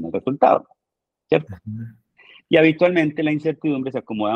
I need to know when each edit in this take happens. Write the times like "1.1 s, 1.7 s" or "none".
none